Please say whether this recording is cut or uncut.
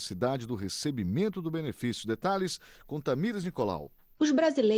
uncut